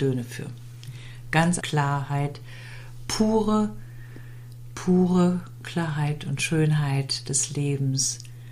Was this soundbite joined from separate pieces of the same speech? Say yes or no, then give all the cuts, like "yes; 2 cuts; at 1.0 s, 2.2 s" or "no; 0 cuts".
yes; 1 cut; at 1.6 s